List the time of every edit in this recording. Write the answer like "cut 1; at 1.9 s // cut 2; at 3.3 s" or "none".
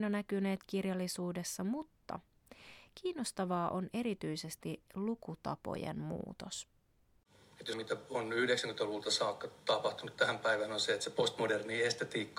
cut 1; at 7.7 s

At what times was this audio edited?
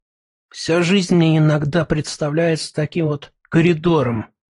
none

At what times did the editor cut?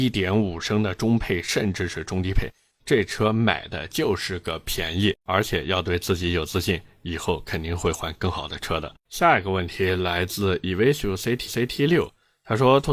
cut 1; at 5.2 s // cut 2; at 9.0 s // cut 3; at 11.5 s

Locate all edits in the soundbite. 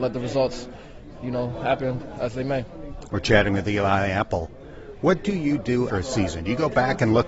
cut 1; at 5.9 s

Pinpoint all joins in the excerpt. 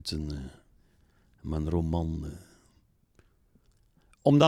none

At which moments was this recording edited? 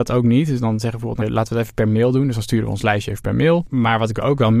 cut 1; at 1.2 s

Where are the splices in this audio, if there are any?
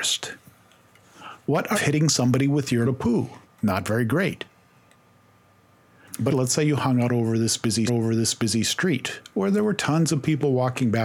cut 1; at 1.4 s // cut 2; at 1.7 s // cut 3; at 2.8 s // cut 4; at 3.4 s // cut 5; at 6.3 s // cut 6; at 7.9 s

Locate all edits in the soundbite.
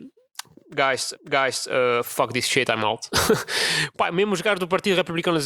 cut 1; at 1.1 s

